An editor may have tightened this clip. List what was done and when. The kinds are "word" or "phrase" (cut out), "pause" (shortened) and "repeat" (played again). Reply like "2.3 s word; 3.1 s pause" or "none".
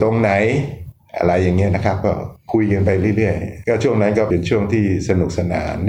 3.6 s word

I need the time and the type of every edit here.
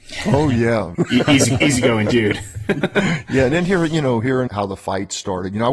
0.9 s phrase; 4.5 s word

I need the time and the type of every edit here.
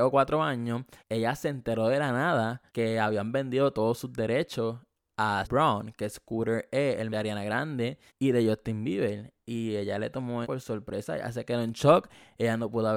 1.0 s pause; 2.7 s pause; 5.4 s word; 7.1 s word; 8.1 s pause; 10.4 s word

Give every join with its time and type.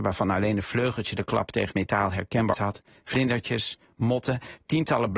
1.7 s word; 2.5 s word

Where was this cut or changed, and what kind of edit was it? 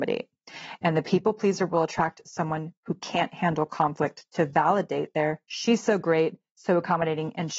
2.8 s pause

